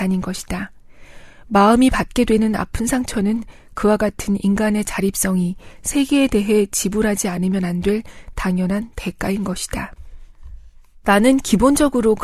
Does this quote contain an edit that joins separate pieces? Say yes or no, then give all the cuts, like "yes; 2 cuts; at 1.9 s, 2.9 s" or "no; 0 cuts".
no; 0 cuts